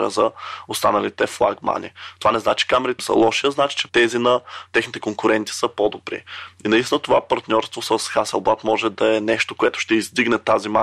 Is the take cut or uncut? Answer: cut